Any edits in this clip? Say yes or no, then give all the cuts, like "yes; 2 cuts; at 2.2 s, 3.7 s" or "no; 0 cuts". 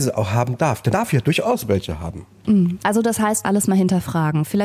yes; 2 cuts; at 0.9 s, 3.4 s